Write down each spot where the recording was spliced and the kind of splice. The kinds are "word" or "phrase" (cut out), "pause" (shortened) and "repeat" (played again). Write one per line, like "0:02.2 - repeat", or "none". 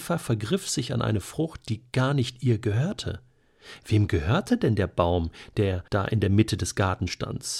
0:05.9 - pause